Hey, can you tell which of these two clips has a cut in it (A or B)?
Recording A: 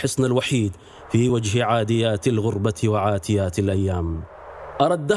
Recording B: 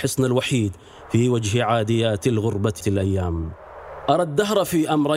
B